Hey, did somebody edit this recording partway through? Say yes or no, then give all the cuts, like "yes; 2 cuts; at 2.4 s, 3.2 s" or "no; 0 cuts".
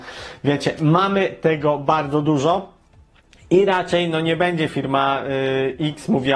no; 0 cuts